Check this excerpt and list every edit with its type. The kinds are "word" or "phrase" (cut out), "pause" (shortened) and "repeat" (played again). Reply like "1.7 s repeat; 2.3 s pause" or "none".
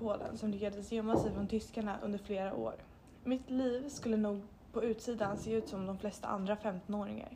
none